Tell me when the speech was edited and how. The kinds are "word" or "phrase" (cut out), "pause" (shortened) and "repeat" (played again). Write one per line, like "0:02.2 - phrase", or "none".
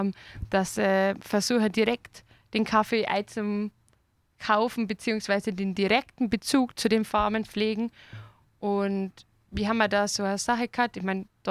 none